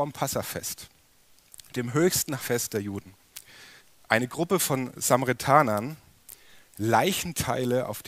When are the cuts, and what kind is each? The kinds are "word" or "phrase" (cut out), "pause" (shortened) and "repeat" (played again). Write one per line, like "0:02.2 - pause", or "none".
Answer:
0:02.4 - word
0:03.8 - pause